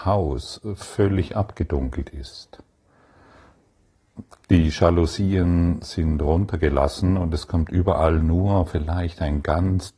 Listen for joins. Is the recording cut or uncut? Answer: uncut